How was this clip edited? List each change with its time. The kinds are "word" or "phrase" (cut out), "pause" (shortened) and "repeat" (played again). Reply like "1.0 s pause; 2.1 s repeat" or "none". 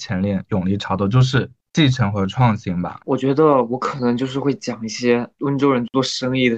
1.6 s word